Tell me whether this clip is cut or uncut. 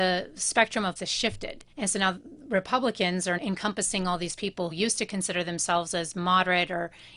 cut